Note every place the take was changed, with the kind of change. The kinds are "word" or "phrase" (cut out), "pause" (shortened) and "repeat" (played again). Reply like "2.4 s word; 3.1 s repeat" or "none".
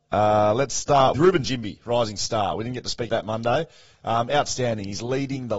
1.1 s word; 3.1 s word